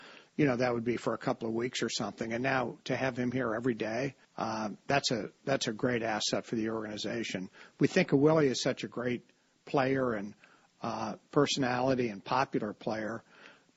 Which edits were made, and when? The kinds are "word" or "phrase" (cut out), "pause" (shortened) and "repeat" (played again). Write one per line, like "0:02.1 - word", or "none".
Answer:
0:04.2 - pause